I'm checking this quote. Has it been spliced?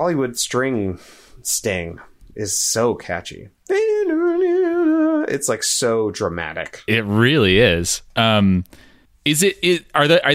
no; 0 cuts

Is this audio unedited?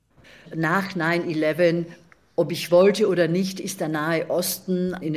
yes; 0 cuts

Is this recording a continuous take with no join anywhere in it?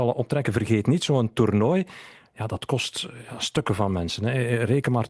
yes; 0 cuts

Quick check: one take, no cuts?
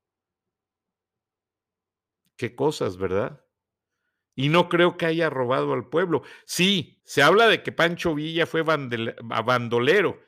no; 1 cut; at 7.0 s

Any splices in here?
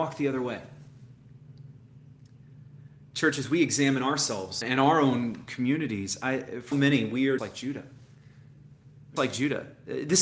yes; 4 cuts; at 4.6 s, 6.7 s, 7.4 s, 9.2 s

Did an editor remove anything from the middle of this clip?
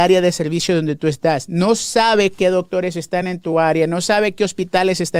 no; 0 cuts

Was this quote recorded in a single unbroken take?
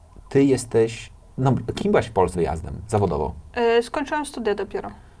no; 2 cuts; at 1.8 s, 2.3 s

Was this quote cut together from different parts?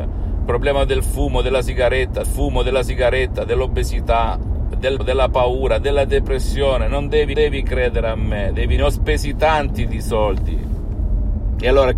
yes; 4 cuts; at 2.2 s, 5.0 s, 7.3 s, 8.8 s

